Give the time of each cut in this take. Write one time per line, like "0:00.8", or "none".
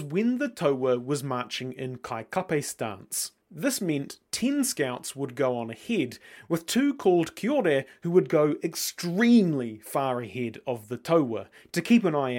0:03.4